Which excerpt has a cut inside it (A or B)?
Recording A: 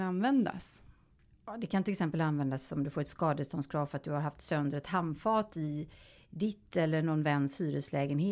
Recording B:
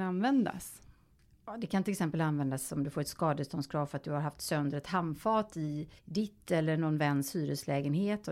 B